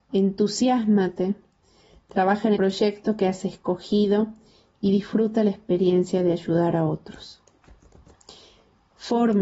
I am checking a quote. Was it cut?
yes; 1 cut; at 2.6 s

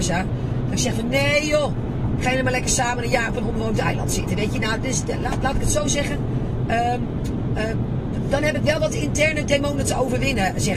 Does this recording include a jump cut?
no; 0 cuts

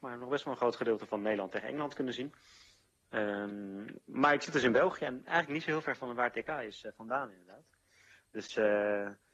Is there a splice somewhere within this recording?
no; 0 cuts

